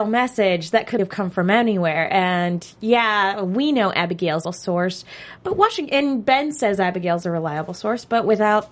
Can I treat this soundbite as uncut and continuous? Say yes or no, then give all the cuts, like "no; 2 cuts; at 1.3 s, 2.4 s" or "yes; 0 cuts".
no; 3 cuts; at 1.0 s, 4.4 s, 5.4 s